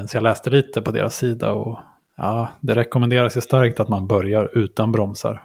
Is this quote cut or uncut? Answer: uncut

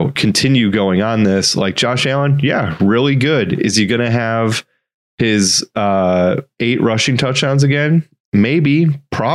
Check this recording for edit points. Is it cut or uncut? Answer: uncut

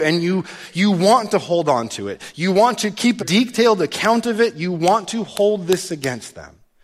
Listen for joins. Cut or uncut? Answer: cut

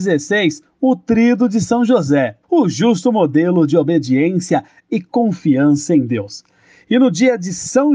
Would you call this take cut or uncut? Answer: cut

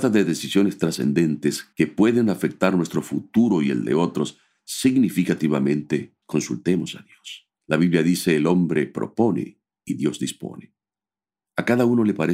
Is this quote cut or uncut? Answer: cut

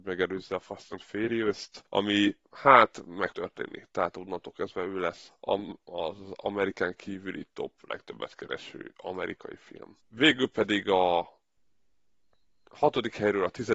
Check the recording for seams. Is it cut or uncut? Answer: cut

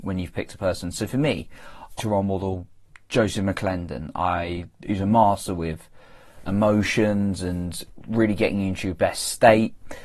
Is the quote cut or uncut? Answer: cut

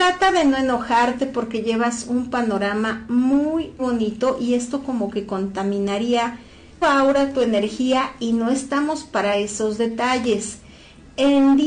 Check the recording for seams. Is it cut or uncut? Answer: cut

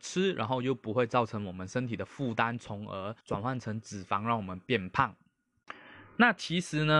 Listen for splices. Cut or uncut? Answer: cut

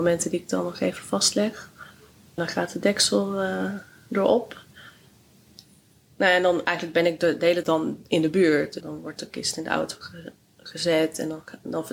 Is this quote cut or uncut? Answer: cut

